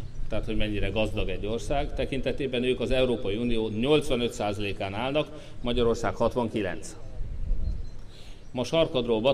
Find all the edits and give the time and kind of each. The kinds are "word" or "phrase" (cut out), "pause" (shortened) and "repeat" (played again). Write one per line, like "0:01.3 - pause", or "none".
none